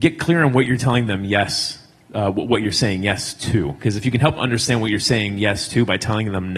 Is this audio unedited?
no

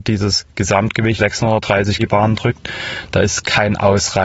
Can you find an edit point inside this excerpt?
yes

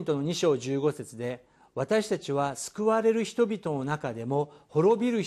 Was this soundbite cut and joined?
no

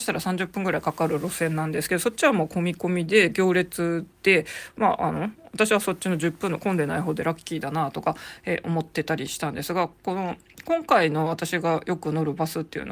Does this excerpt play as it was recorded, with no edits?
no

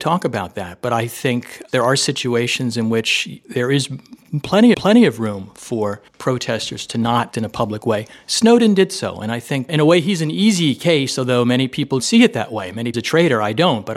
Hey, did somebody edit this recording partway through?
yes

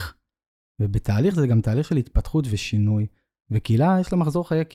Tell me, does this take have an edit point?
no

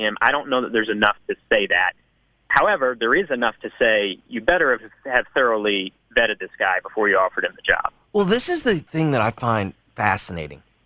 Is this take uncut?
yes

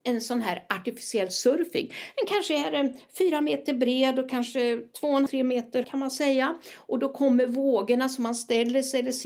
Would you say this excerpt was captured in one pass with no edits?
no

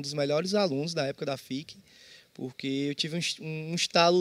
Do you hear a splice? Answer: no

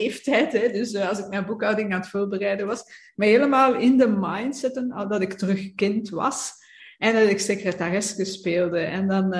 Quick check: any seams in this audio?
no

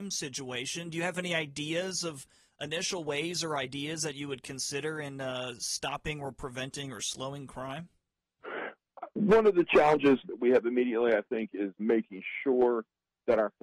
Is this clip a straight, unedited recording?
no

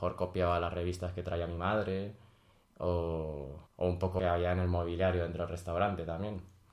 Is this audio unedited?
no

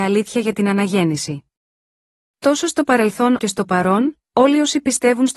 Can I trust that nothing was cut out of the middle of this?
no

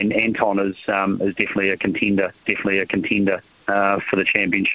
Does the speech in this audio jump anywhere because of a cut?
yes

